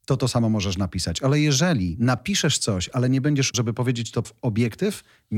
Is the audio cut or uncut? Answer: cut